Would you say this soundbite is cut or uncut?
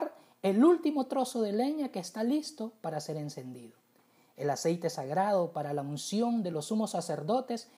uncut